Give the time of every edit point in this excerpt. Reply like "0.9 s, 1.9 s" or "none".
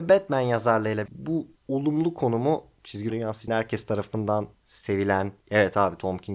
1.1 s, 1.6 s, 3.1 s, 3.5 s, 5.4 s